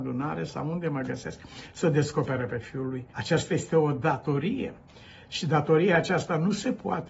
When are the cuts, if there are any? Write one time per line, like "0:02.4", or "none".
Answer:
0:03.1